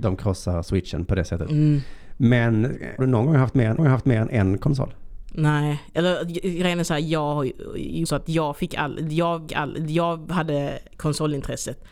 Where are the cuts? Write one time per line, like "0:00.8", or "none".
0:03.0
0:03.8
0:08.1
0:09.5